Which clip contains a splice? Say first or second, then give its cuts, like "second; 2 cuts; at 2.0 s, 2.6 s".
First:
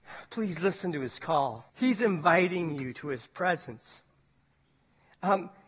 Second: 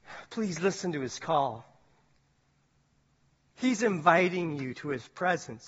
first; 1 cut; at 1.7 s